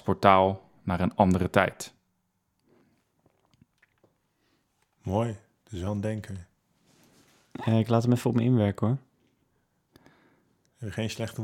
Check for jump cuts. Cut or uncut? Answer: uncut